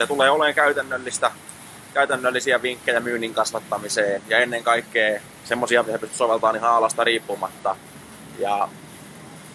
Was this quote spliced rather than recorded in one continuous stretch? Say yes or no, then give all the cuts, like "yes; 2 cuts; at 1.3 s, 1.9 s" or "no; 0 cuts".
yes; 1 cut; at 5.8 s